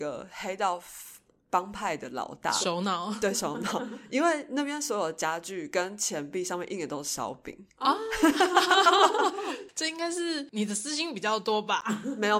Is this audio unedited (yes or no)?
yes